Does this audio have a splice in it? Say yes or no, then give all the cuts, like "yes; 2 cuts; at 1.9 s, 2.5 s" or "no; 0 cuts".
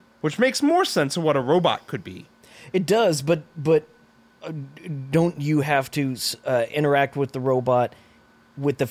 no; 0 cuts